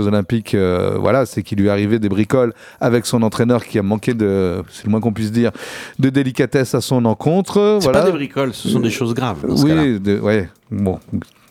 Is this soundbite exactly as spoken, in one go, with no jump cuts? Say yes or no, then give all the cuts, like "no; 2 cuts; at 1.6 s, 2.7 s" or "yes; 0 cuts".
yes; 0 cuts